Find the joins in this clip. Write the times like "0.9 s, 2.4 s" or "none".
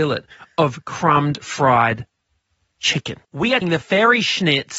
3.2 s, 3.6 s